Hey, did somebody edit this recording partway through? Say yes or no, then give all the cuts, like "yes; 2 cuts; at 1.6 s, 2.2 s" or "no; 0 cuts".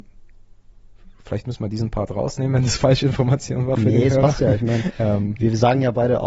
no; 0 cuts